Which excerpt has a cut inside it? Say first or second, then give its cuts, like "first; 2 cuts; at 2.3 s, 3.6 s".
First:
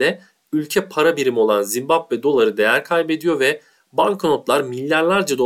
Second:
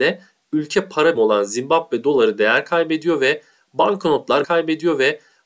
second; 2 cuts; at 1.1 s, 4.4 s